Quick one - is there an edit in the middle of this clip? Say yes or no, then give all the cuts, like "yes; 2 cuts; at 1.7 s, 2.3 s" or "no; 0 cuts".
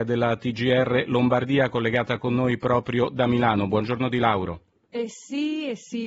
no; 0 cuts